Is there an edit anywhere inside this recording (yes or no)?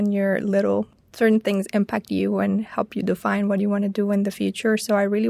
no